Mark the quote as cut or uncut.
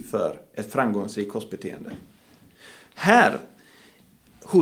uncut